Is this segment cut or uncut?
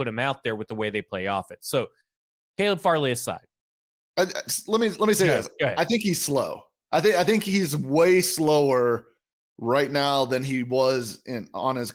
uncut